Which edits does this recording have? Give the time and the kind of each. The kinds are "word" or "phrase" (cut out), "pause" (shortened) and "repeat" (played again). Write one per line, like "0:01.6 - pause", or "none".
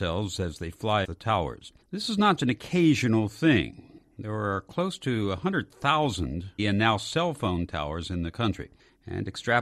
0:01.0 - word
0:01.8 - pause
0:02.4 - word
0:06.6 - phrase